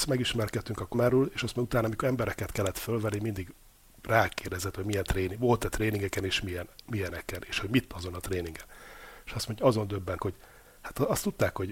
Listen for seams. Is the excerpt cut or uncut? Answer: cut